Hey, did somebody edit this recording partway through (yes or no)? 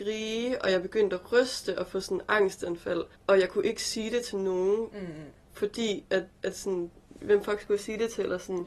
yes